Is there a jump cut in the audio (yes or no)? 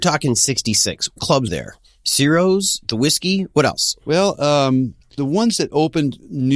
yes